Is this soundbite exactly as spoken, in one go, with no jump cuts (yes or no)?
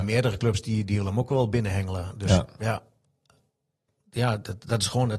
yes